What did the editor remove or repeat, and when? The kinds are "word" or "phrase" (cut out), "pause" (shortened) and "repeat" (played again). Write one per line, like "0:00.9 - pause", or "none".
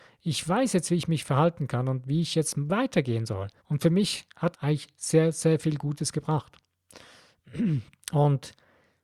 0:03.6 - pause
0:04.5 - word
0:08.0 - pause